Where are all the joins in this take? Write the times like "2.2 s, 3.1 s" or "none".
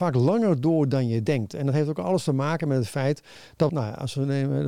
3.7 s